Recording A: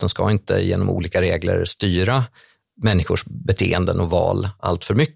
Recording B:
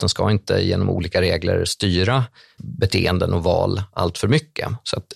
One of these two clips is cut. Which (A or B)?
B